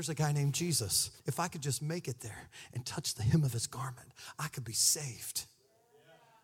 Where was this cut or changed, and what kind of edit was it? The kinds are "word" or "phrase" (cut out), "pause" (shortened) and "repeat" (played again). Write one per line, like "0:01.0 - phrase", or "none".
0:01.2 - pause